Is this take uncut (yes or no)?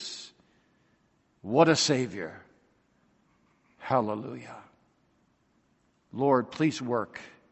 no